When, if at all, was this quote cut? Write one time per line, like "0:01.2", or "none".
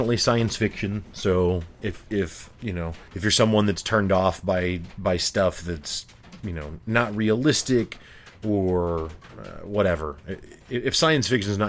0:03.1

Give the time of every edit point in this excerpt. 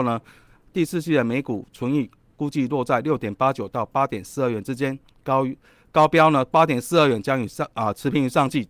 none

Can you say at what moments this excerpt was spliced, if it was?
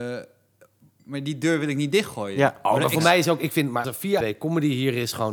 0:03.8
0:04.2

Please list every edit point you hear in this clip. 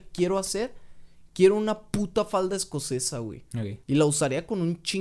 0:03.8

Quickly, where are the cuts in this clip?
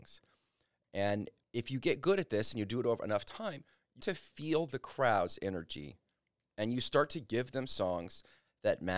0:01.4
0:04.0

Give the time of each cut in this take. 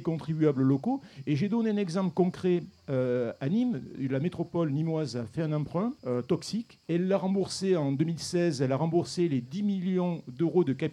0:06.0
0:06.8

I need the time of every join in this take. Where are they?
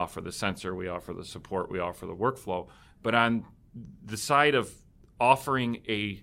none

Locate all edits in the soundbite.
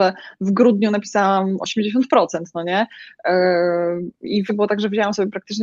0:04.5

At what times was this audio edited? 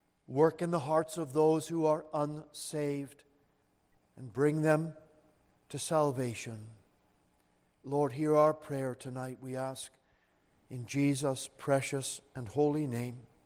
none

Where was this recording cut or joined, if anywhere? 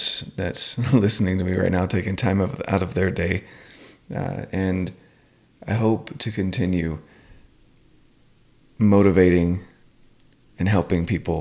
none

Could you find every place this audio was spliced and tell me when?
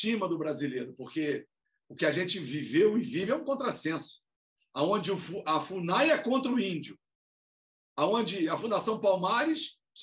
none

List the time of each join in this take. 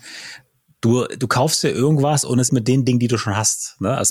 0:02.5

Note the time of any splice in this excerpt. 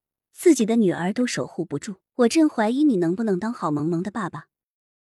0:02.1

